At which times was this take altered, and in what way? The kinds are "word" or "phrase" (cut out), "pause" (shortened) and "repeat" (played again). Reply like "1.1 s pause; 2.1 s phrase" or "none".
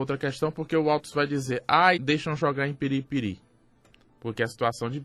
2.0 s phrase